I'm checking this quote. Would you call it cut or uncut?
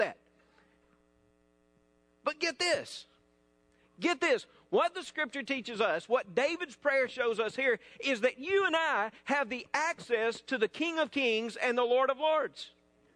uncut